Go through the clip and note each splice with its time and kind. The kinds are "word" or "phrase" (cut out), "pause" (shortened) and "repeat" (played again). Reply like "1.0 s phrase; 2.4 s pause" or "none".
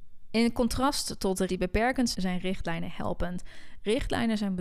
1.5 s word; 2.1 s word

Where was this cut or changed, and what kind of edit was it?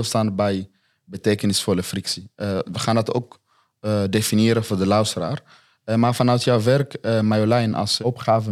none

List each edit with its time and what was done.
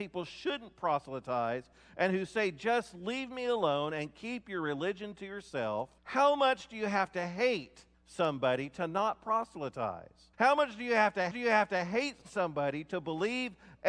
6.0 s pause; 7.9 s pause; 10.3 s pause; 11.3 s repeat

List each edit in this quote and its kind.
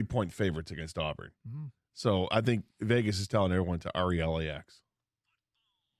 2.7 s pause

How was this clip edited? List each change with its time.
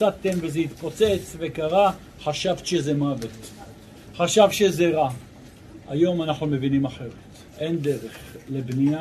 7.5 s pause

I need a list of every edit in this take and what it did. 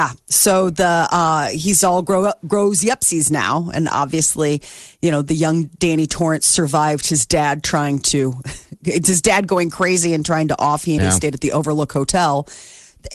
11.0 s phrase

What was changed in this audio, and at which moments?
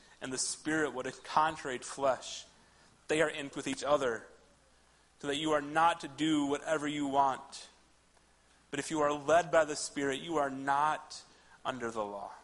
1.8 s word; 3.5 s word

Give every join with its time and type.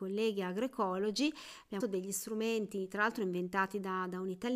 1.8 s word

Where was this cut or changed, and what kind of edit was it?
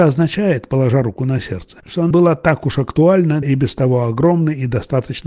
1.8 s word; 2.1 s word; 3.4 s word

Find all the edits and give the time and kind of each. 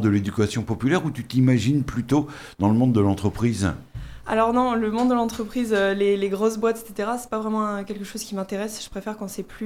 none

